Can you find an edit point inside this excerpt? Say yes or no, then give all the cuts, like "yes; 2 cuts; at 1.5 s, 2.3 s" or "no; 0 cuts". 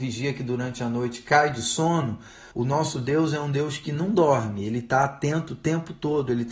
yes; 1 cut; at 2.5 s